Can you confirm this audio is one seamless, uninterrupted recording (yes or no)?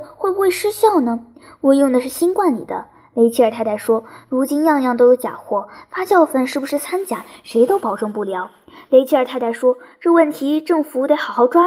yes